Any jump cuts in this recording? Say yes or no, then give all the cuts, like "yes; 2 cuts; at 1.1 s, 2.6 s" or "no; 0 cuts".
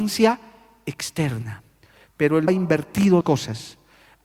yes; 2 cuts; at 2.5 s, 3.2 s